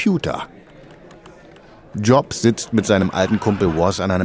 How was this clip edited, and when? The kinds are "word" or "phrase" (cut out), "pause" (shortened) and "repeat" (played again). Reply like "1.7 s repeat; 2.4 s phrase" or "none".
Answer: none

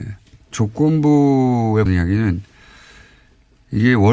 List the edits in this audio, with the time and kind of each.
1.9 s word

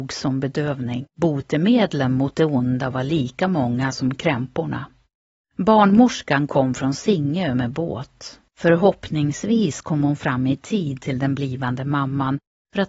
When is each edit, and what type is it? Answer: 1.1 s pause; 5.3 s pause; 8.5 s pause

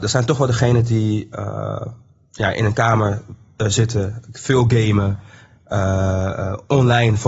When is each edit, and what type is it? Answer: none

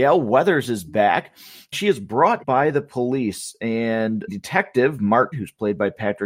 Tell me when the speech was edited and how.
1.7 s word; 2.4 s word; 4.3 s word; 5.3 s word

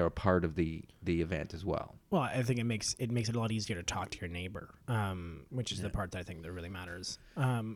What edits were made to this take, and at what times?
4.8 s pause

